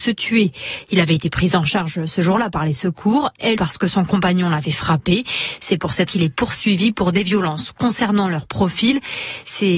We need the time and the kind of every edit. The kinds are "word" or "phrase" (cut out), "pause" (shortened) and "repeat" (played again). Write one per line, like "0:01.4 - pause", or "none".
0:03.6 - word
0:06.1 - word